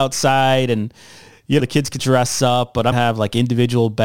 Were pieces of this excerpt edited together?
yes; 3 cuts; at 1.6 s, 2.0 s, 2.9 s

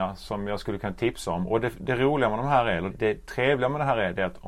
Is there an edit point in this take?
yes; 1 cut; at 2.9 s

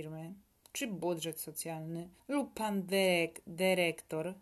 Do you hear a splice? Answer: yes; 1 cut; at 2.2 s

